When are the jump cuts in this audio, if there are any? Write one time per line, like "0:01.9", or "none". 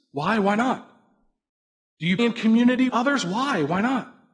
0:02.2
0:02.9